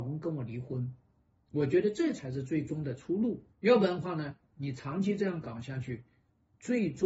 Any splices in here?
yes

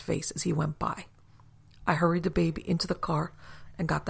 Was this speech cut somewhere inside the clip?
no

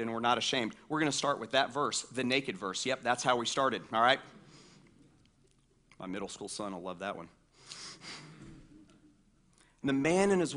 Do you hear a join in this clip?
no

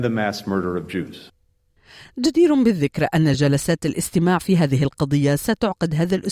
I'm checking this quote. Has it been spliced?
no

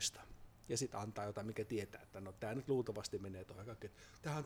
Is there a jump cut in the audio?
no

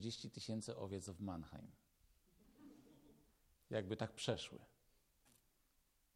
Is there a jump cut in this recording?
no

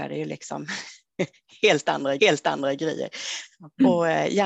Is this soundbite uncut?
no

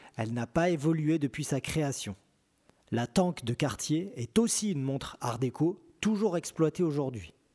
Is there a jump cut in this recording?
no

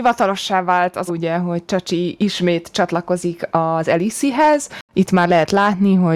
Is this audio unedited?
no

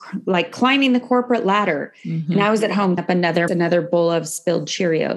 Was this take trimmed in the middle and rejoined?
yes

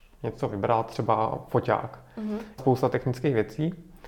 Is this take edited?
yes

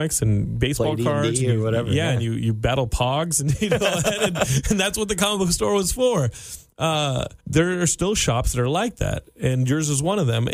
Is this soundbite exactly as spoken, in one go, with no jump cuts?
no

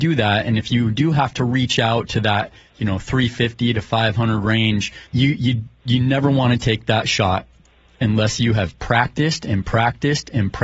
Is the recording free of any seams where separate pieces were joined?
no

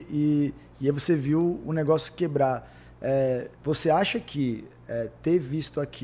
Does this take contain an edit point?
yes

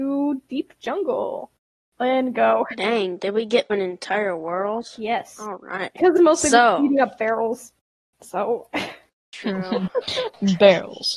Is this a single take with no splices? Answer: no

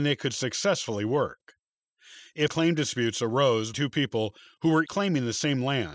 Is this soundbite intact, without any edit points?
no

